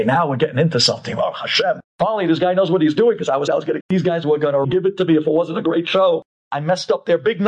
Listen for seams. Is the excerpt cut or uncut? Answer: cut